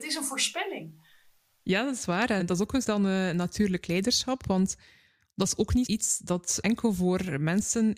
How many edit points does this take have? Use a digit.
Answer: 4